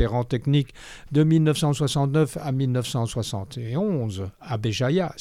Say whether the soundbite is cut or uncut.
uncut